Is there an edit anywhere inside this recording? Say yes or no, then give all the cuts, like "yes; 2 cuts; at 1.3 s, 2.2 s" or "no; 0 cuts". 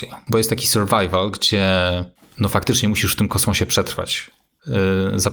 no; 0 cuts